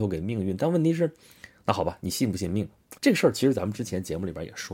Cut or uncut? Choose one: cut